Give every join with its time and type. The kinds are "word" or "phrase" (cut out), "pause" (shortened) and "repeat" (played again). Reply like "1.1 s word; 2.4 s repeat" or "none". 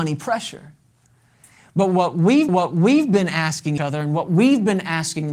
2.5 s repeat; 3.8 s word